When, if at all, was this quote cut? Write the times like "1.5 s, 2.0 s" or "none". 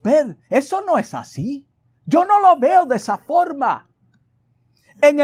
none